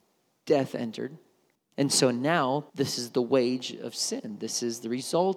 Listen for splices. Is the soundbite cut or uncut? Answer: cut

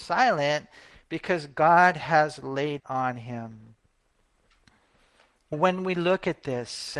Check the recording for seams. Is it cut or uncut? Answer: cut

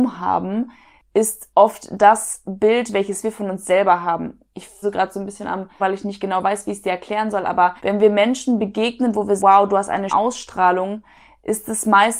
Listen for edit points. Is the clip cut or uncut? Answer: cut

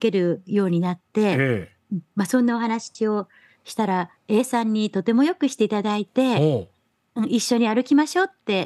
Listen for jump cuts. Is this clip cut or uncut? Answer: uncut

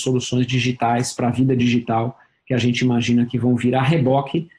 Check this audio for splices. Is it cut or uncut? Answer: uncut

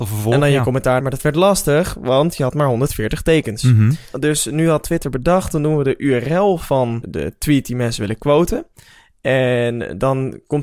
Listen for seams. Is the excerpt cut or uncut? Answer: cut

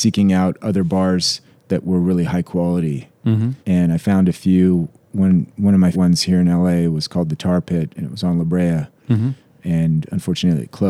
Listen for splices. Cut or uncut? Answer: cut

